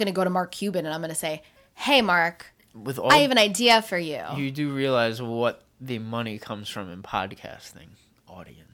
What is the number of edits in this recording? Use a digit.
0